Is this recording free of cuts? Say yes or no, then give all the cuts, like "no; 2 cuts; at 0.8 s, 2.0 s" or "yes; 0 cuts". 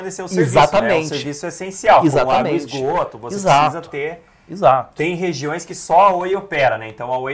yes; 0 cuts